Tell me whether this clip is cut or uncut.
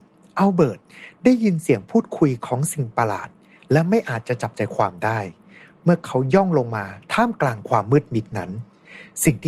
uncut